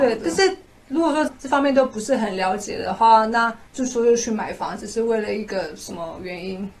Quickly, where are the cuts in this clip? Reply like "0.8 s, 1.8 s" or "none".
3.7 s